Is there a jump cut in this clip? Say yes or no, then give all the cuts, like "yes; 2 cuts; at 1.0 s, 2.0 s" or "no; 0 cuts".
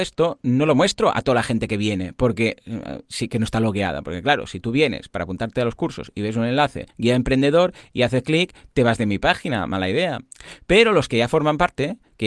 yes; 1 cut; at 6.9 s